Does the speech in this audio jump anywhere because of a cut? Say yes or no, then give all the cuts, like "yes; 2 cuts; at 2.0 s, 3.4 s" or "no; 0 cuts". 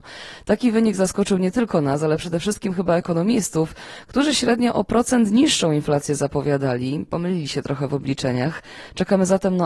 no; 0 cuts